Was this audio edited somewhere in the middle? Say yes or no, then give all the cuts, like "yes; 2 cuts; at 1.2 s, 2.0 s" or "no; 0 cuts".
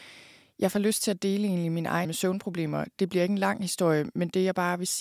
yes; 1 cut; at 2.0 s